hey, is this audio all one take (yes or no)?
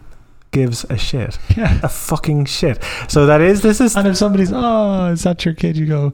no